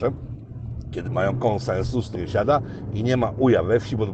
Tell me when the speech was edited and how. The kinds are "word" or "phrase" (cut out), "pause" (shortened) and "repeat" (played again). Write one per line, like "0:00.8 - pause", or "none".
0:01.1 - word
0:02.1 - word

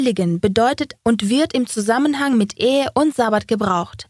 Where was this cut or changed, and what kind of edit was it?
0:01.0 - word

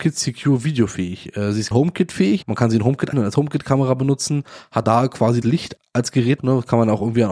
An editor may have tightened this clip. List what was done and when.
0:01.7 - word
0:02.4 - word
0:03.1 - word
0:04.8 - word
0:05.4 - word
0:05.8 - word
0:06.4 - word

